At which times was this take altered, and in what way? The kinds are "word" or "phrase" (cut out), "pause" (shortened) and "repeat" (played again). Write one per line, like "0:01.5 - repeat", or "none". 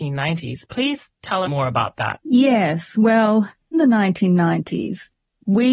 0:01.4 - phrase
0:02.2 - pause
0:03.7 - word